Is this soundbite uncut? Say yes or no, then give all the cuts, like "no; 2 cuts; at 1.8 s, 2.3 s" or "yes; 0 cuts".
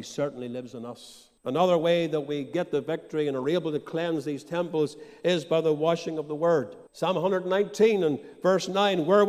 no; 2 cuts; at 1.4 s, 6.9 s